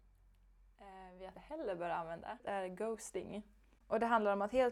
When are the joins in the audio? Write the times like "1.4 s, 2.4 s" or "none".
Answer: 1.3 s